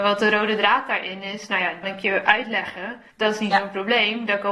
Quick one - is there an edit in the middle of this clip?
yes; 2 cuts; at 1.8 s, 3.1 s

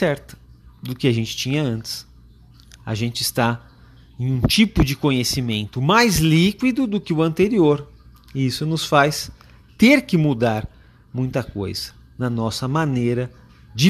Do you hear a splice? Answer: no; 0 cuts

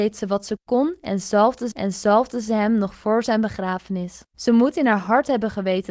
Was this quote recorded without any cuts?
no; 2 cuts; at 1.7 s, 4.3 s

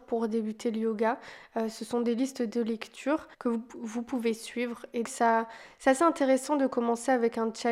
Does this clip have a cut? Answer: yes; 2 cuts; at 3.3 s, 5.0 s

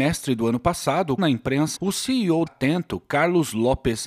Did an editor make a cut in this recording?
yes; 3 cuts; at 1.2 s, 1.8 s, 2.5 s

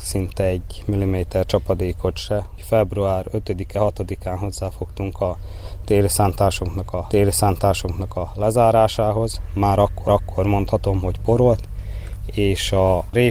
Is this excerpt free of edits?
no; 2 cuts; at 7.1 s, 10.1 s

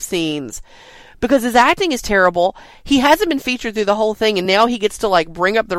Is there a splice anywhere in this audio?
no; 0 cuts

